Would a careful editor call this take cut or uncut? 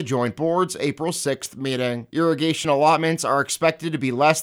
uncut